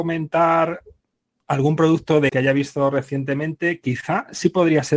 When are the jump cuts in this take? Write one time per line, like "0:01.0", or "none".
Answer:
0:02.3